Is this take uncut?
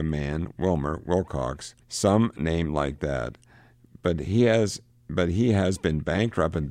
no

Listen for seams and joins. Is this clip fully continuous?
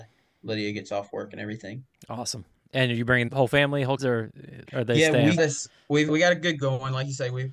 no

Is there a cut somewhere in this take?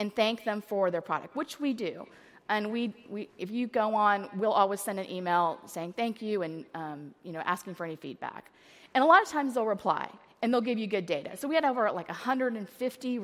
no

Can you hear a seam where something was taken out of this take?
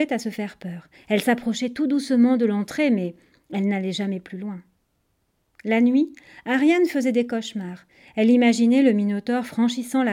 no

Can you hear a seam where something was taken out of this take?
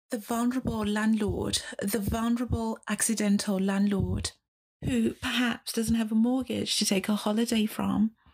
no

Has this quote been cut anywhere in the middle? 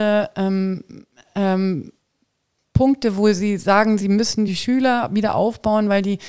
no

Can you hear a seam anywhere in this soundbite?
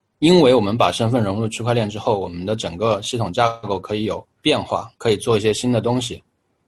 yes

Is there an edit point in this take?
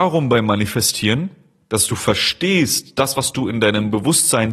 no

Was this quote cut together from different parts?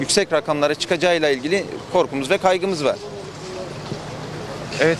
no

